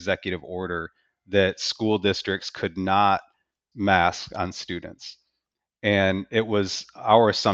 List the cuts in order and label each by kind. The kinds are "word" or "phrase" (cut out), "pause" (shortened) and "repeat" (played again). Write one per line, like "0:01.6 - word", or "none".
0:03.7 - word